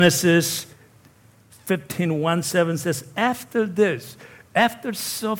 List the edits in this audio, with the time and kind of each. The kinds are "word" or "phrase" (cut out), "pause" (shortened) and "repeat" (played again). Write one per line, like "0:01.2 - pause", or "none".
none